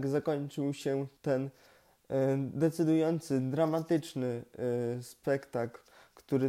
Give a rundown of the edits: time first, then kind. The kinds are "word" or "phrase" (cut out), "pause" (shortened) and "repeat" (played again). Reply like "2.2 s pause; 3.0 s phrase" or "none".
1.2 s pause